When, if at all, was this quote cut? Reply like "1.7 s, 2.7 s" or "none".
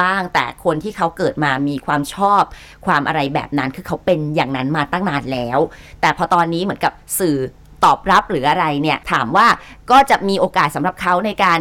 7.6 s, 9.0 s